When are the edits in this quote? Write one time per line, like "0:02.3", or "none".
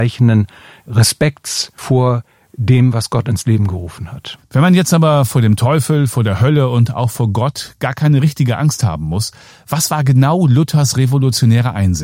none